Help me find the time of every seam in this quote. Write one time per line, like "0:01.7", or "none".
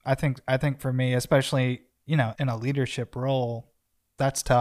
0:02.4

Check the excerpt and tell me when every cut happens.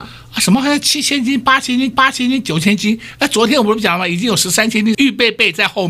0:01.9
0:04.9

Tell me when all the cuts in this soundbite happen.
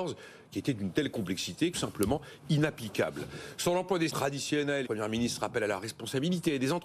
0:01.7
0:04.1
0:04.8

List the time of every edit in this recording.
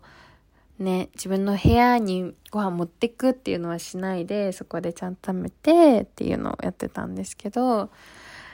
0:02.4

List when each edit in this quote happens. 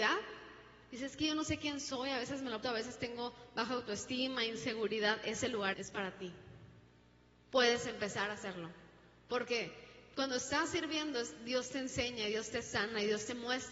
0:02.6
0:05.7

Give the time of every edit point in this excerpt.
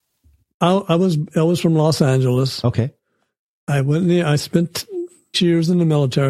0:05.3

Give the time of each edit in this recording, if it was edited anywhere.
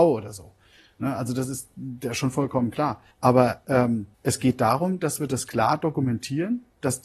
0:03.1
0:04.1

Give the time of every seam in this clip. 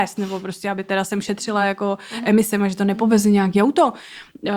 none

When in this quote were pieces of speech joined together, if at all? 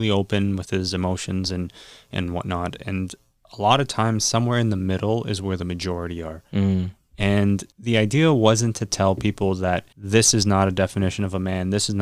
0:07.7
0:09.9

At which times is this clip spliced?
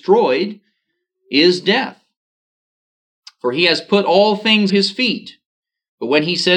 0:04.7

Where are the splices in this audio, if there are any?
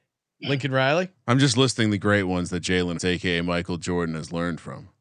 0:03.0

